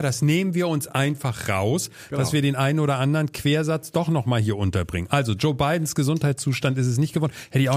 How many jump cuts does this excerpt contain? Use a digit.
0